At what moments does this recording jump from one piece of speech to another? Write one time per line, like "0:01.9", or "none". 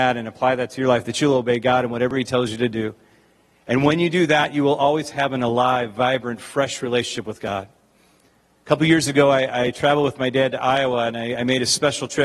none